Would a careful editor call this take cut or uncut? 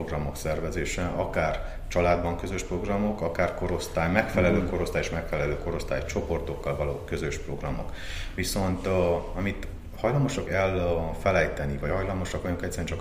cut